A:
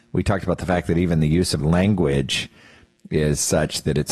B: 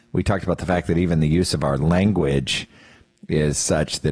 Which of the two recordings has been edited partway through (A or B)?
A